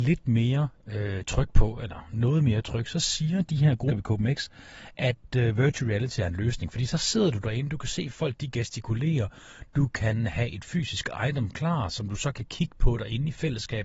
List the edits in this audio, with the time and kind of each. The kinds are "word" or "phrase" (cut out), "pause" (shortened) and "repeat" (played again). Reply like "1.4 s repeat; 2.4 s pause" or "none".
3.9 s word